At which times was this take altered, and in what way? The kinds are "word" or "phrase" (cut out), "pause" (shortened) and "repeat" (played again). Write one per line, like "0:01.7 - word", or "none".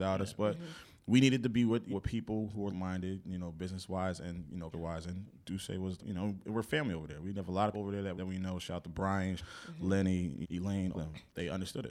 0:01.9 - word
0:02.7 - word
0:04.7 - word
0:06.0 - word
0:07.7 - word
0:08.1 - word
0:09.4 - word
0:10.4 - word
0:10.9 - word